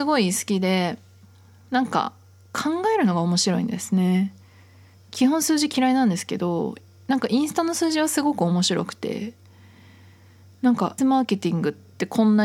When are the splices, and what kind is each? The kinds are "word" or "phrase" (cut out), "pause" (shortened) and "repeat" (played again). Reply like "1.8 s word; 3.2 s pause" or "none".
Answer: 11.0 s word